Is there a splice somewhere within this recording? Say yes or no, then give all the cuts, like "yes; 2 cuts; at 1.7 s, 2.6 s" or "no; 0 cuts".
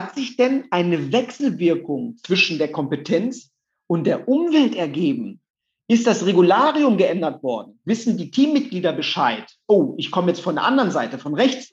no; 0 cuts